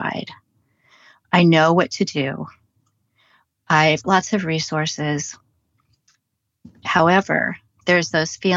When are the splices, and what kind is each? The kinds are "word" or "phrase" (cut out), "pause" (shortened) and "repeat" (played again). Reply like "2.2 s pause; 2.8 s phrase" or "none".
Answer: 4.0 s word